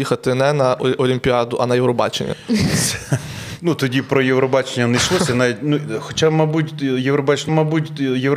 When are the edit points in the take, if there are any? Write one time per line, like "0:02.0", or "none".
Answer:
0:07.5